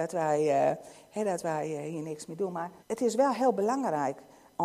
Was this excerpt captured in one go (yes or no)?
no